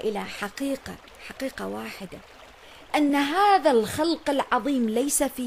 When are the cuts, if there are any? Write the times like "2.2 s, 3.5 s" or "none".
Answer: none